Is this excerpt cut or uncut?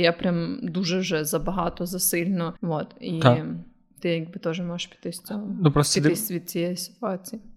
cut